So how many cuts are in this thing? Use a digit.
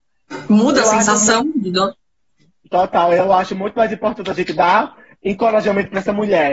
0